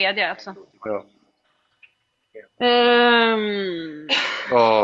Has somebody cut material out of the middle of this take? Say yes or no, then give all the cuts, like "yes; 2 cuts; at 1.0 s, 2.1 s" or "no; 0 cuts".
yes; 1 cut; at 2.5 s